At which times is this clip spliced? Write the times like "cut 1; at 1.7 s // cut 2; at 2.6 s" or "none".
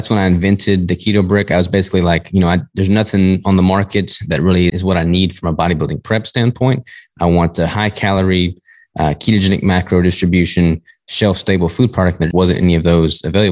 cut 1; at 4.7 s // cut 2; at 12.3 s